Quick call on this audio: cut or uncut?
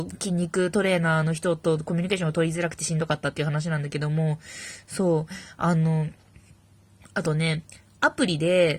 uncut